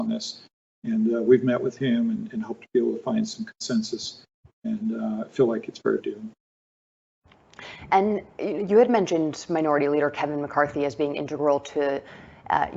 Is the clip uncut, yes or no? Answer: no